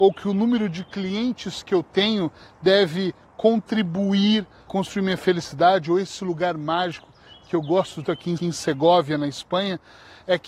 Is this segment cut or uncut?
cut